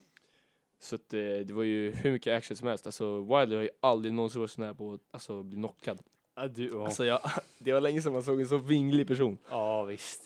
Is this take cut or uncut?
cut